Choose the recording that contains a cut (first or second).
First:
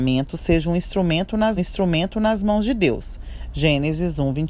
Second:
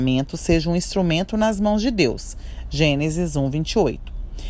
first